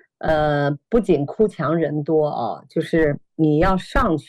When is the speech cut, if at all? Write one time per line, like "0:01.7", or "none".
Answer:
none